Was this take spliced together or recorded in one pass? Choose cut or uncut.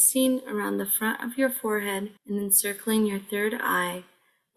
cut